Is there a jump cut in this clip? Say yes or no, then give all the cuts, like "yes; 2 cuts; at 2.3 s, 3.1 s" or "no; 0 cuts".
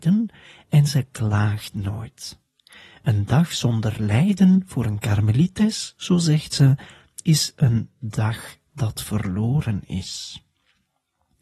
no; 0 cuts